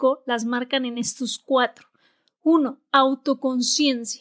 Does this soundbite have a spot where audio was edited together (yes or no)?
no